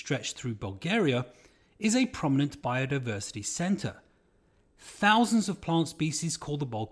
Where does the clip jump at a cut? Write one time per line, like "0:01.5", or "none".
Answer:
none